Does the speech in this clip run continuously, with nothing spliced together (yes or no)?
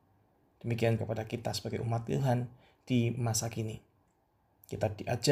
no